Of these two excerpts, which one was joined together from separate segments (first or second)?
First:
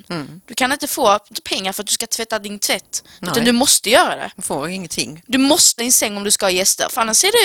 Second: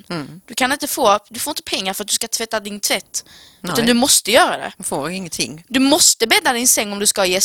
first